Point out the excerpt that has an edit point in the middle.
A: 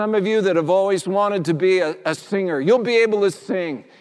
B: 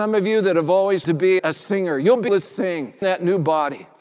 B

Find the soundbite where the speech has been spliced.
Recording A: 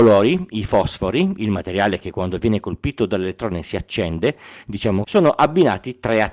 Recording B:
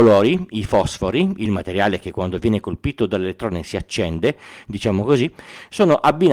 A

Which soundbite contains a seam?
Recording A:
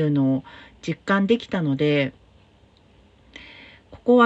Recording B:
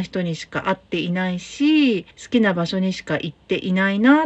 B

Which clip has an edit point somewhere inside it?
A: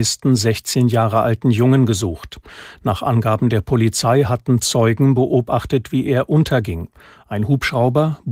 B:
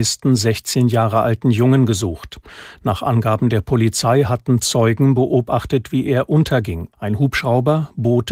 B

